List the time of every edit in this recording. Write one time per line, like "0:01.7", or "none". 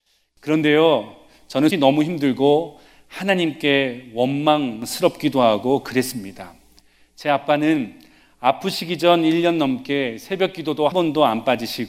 0:01.7
0:10.9